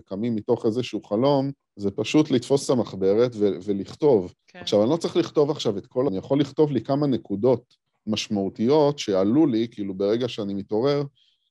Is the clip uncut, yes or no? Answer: no